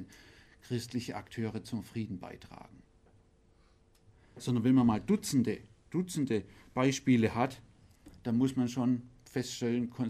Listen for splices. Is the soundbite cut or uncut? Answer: uncut